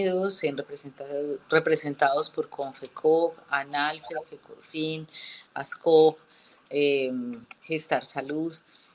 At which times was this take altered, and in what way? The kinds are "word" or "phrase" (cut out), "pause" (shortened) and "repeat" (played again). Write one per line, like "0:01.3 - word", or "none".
none